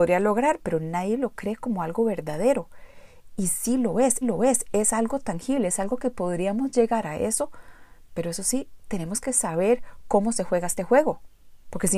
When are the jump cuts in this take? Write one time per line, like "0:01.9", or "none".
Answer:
0:04.2
0:09.2